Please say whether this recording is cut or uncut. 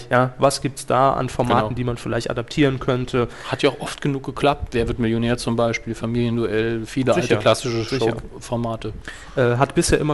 uncut